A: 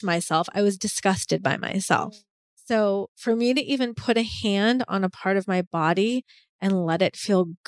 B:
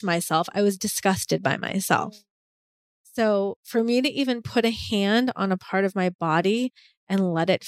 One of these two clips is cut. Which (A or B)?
A